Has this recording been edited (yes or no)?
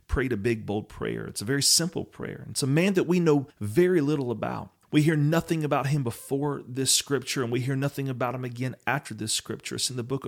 yes